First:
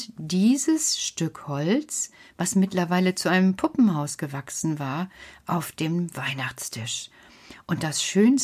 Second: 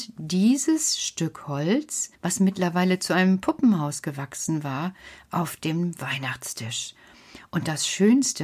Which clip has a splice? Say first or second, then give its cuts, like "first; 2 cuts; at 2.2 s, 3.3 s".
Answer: second; 1 cut; at 2.1 s